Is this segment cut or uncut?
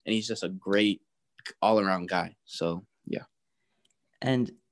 uncut